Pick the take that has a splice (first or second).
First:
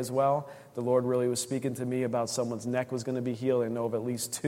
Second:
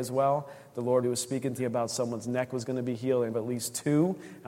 second